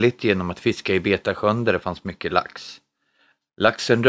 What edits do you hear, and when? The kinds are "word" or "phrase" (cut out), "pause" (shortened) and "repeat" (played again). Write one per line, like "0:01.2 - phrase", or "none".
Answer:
none